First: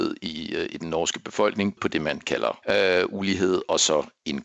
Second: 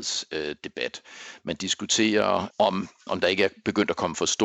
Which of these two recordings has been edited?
first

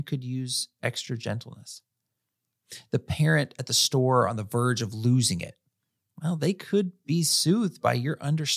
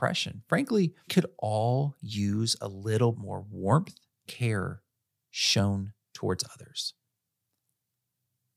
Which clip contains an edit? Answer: second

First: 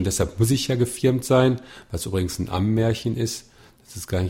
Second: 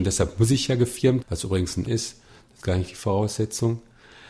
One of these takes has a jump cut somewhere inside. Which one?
second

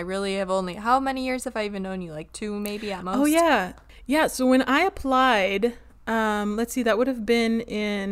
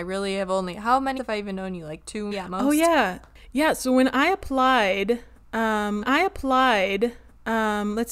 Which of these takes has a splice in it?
second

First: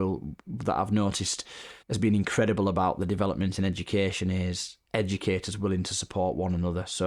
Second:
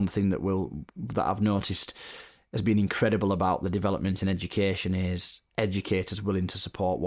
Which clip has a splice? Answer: first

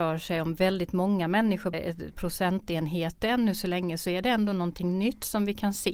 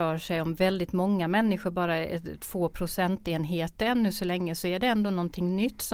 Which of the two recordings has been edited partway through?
first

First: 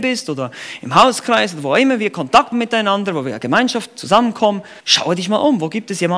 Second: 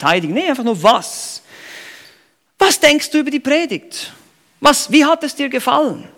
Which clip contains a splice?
first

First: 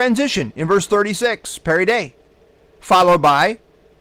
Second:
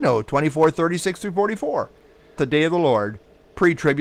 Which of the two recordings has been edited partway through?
second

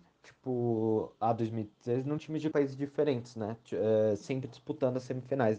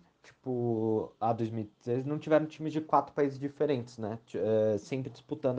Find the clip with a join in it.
first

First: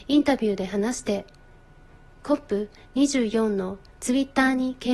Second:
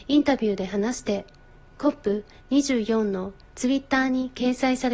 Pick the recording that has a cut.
second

